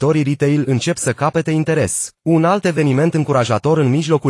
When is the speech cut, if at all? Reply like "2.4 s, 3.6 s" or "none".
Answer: 2.2 s